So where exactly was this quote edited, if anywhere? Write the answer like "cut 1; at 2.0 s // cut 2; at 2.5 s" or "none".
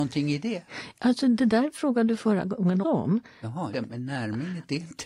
cut 1; at 2.8 s // cut 2; at 3.7 s